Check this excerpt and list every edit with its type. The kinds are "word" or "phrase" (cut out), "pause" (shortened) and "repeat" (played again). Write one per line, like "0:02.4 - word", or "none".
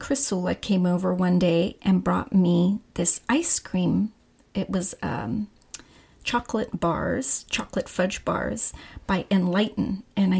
none